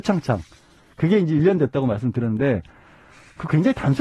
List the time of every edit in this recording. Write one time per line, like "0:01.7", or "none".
none